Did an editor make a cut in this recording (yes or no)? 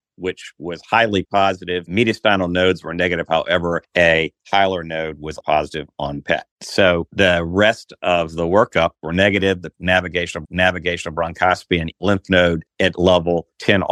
yes